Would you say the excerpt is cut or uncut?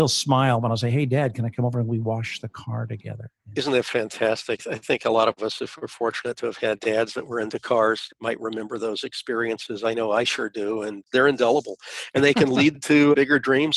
uncut